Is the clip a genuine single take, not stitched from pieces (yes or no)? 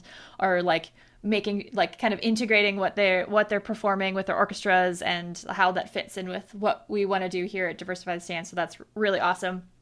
yes